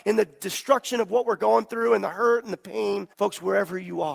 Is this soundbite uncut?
no; 1 cut; at 3.1 s

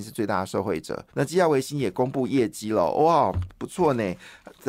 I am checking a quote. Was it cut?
yes; 1 cut; at 1.1 s

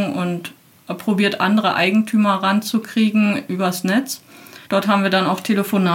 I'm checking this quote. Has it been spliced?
yes; 1 cut; at 4.7 s

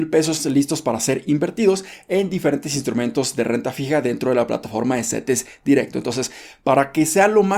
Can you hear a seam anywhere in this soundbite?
no; 0 cuts

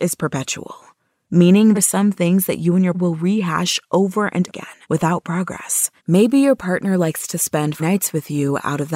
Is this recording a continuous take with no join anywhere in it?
no; 6 cuts; at 1.7 s, 2.9 s, 4.5 s, 4.8 s, 6.0 s, 7.8 s

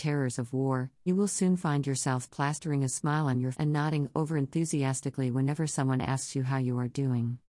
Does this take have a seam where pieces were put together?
yes; 2 cuts; at 1.1 s, 3.5 s

